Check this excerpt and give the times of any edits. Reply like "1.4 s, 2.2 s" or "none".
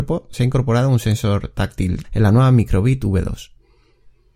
2.0 s